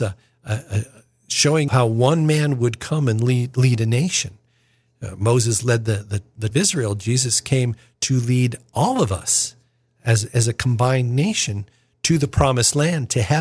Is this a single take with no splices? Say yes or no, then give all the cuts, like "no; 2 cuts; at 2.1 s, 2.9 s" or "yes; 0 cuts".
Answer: no; 2 cuts; at 1.7 s, 6.5 s